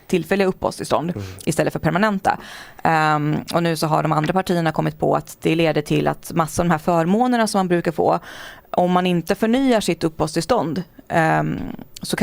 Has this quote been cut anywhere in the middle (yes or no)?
no